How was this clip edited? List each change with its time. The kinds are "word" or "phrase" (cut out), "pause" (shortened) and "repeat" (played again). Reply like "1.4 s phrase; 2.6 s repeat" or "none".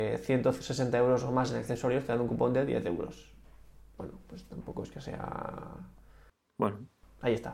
none

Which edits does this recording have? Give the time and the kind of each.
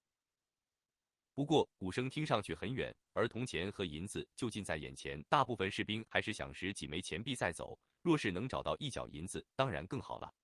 5.3 s pause

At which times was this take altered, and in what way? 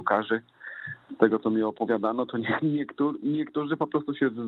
none

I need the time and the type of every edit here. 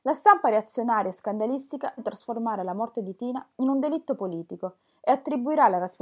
2.0 s word

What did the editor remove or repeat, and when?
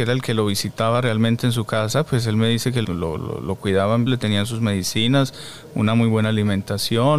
2.8 s word; 4.1 s phrase

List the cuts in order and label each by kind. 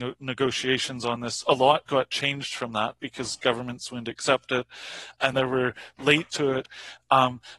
5.3 s word; 6.3 s word

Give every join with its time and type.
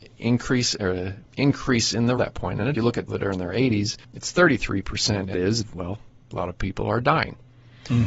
1.3 s pause; 2.2 s phrase; 2.7 s phrase; 3.1 s word; 4.0 s pause; 5.3 s phrase

